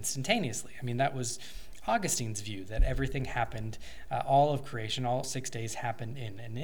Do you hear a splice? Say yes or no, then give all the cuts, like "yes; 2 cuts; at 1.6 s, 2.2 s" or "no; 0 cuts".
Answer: yes; 1 cut; at 5.2 s